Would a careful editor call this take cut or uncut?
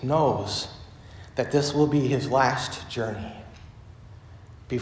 uncut